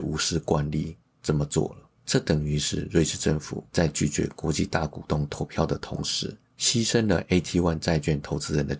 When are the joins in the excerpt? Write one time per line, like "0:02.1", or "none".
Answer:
0:02.0
0:03.7
0:06.4